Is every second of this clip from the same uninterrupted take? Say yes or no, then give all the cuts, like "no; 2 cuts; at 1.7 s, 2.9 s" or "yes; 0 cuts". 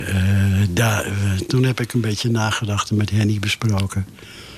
yes; 0 cuts